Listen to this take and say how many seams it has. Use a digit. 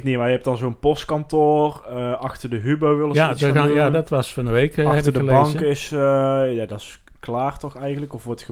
0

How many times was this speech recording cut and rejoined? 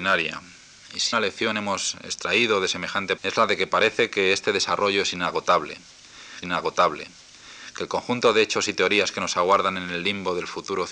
3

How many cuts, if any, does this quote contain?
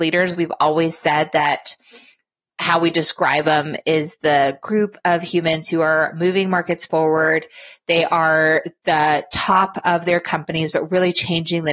0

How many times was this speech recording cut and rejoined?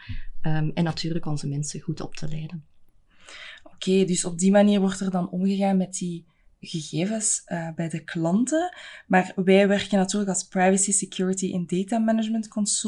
0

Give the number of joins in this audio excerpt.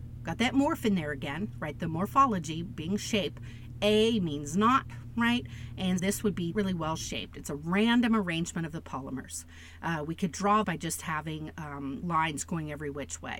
4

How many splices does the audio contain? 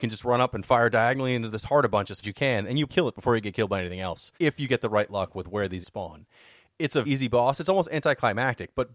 5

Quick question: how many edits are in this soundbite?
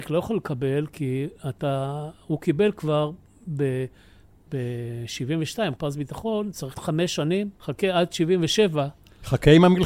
3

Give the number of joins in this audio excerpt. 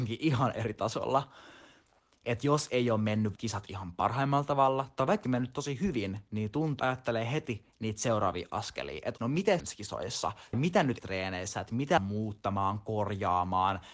8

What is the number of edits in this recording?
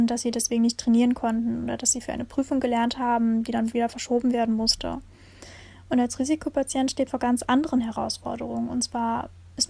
1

